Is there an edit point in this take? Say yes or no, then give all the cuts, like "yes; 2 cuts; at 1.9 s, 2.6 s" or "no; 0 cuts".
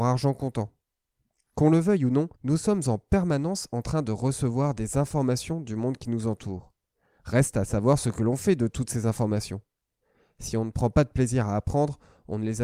yes; 1 cut; at 2.4 s